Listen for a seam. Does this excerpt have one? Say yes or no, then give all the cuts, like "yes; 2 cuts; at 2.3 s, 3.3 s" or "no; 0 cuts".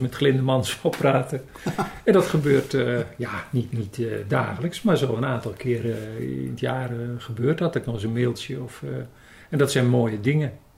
no; 0 cuts